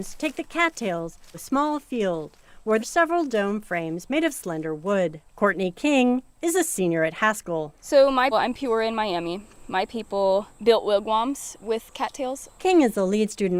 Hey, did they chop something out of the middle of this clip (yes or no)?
yes